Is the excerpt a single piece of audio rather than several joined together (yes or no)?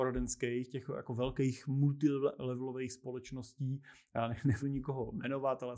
no